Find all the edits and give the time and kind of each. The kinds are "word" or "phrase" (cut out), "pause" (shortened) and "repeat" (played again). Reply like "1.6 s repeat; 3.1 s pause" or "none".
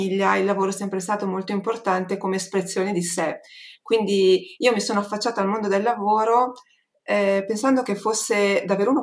none